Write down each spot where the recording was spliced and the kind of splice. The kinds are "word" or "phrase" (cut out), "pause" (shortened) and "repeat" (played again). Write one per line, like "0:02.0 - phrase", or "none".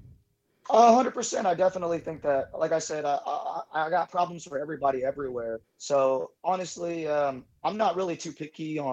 0:05.6 - pause